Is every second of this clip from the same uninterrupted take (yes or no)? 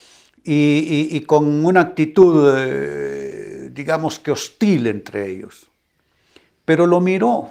yes